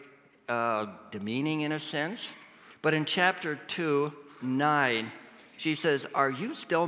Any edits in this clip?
yes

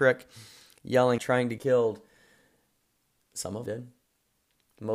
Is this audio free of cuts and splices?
no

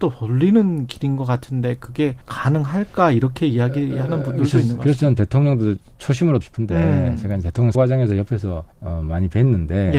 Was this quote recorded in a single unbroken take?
no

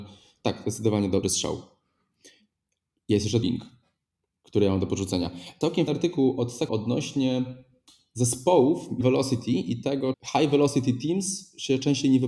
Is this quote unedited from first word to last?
no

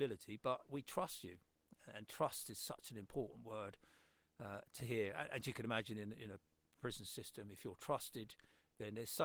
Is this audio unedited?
yes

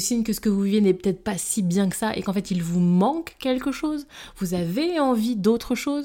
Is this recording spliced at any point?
no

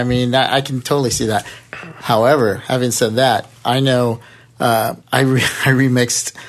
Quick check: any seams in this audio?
yes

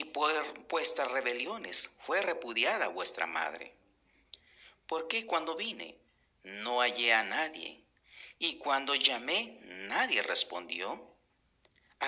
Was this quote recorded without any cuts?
yes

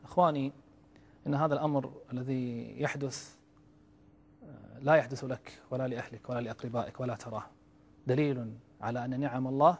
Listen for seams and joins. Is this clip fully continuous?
yes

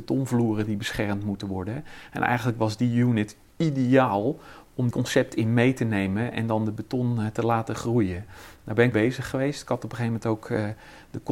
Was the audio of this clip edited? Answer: yes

